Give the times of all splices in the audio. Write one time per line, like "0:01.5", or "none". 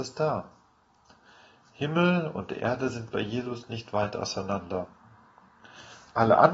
none